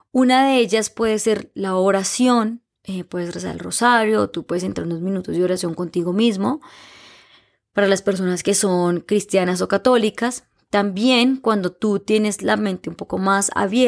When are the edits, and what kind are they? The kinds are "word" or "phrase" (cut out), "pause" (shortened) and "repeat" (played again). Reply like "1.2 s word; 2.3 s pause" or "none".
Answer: 2.7 s pause

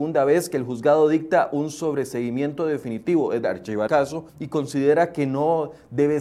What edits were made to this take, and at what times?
3.4 s word; 3.9 s word; 4.3 s pause

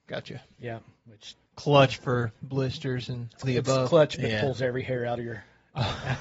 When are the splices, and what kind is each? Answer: 1.5 s pause; 3.4 s word

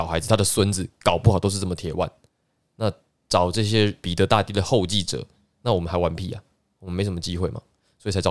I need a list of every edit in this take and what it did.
none

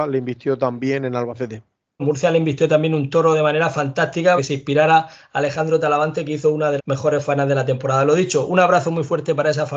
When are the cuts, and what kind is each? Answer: 2.0 s word; 4.4 s word; 6.8 s word

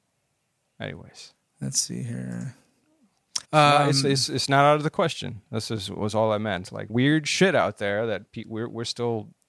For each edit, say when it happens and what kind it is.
3.4 s pause; 6.9 s phrase

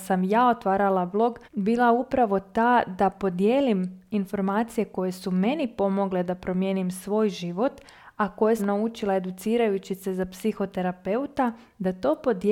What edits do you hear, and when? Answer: 1.4 s pause; 8.6 s word

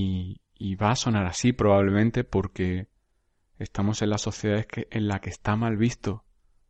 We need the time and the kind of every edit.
none

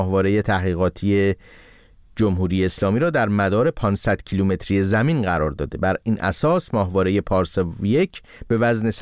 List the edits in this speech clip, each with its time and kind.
none

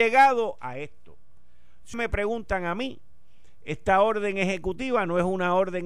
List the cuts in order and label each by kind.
1.9 s word

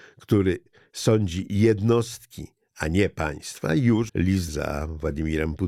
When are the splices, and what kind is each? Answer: 4.1 s word; 4.5 s word

